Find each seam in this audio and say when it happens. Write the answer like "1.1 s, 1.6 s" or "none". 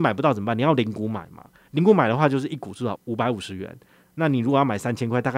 none